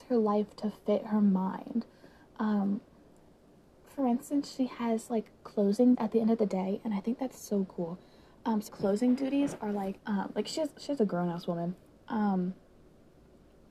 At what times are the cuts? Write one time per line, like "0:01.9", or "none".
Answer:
0:05.9
0:08.7
0:10.0

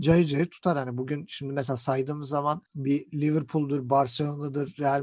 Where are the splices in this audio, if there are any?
none

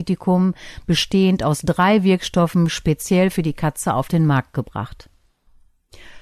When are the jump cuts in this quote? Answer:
none

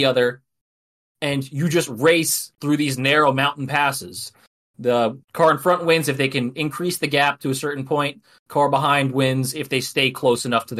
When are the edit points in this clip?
0:05.2

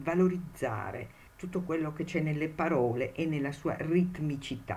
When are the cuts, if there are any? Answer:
0:01.3

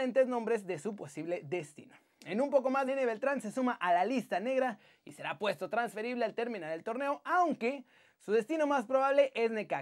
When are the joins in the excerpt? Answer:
0:02.9

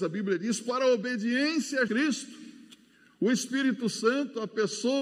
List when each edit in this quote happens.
0:01.9

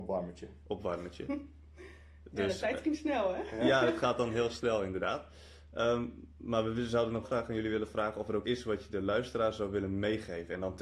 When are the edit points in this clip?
0:07.2
0:08.4

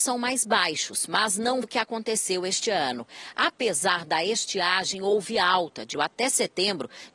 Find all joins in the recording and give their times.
0:01.6
0:05.9

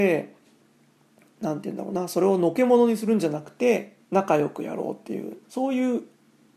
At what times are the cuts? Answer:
0:04.0
0:05.4

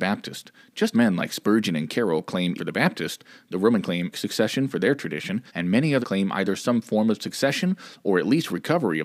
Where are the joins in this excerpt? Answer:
0:00.9
0:02.6
0:03.8
0:04.1
0:05.5
0:06.0

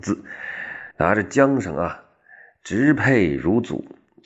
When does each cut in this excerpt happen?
0:00.9

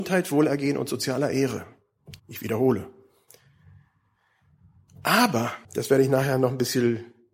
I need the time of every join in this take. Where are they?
0:02.2
0:05.6

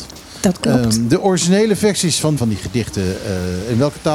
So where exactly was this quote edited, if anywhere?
0:02.4

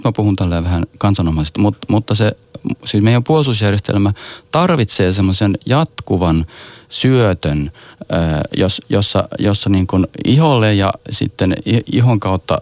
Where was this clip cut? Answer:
0:01.5

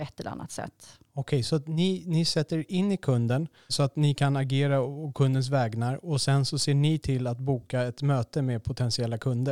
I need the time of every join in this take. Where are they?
0:03.7

